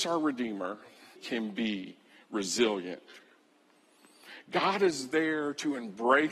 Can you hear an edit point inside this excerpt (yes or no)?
yes